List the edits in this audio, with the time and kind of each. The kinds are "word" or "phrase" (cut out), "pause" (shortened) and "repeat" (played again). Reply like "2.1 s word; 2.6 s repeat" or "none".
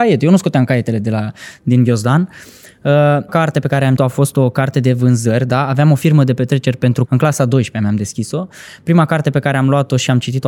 3.3 s word; 4.0 s word; 7.1 s word